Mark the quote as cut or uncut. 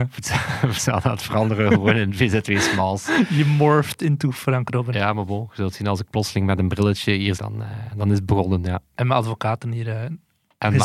cut